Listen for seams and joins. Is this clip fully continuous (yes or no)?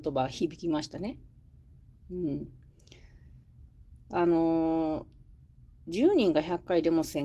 yes